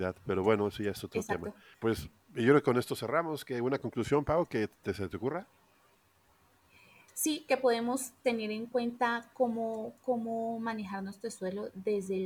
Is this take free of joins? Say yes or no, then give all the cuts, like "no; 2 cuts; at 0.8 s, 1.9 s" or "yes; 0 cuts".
yes; 0 cuts